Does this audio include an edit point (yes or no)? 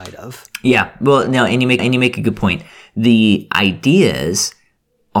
yes